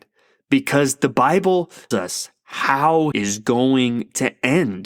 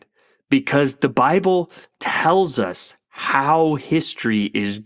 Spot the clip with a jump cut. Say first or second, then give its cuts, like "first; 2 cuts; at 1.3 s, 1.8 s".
first; 2 cuts; at 1.9 s, 3.1 s